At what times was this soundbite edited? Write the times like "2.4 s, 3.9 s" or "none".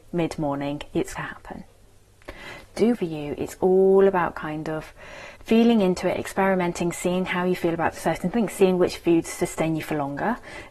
1.2 s, 2.9 s, 5.4 s